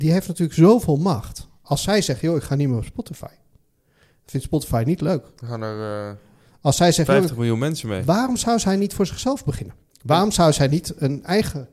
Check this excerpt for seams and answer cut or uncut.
cut